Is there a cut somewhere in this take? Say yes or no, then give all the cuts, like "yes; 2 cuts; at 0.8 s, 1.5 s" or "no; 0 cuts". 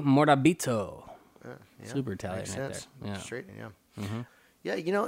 yes; 1 cut; at 3.5 s